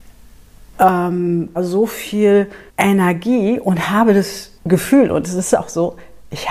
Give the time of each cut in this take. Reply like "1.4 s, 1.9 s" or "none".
1.6 s, 2.7 s, 4.6 s